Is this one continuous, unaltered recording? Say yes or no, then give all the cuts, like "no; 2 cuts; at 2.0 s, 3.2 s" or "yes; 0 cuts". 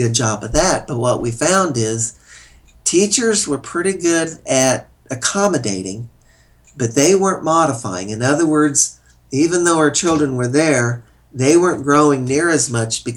yes; 0 cuts